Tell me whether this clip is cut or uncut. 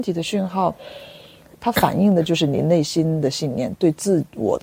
uncut